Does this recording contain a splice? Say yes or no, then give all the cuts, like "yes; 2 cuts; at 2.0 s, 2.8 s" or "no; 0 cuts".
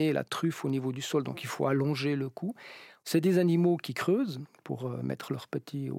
no; 0 cuts